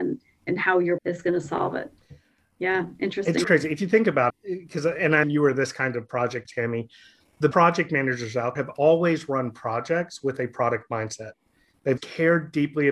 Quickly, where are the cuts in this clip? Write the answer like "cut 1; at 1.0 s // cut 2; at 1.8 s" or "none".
cut 1; at 1.0 s // cut 2; at 3.4 s // cut 3; at 4.3 s // cut 4; at 5.2 s // cut 5; at 6.5 s // cut 6; at 7.5 s // cut 7; at 8.6 s // cut 8; at 12.0 s